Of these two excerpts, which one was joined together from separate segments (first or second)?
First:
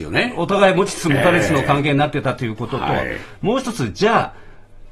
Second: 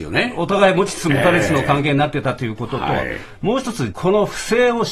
second